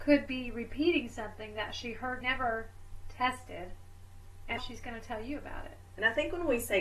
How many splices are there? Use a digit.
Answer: 2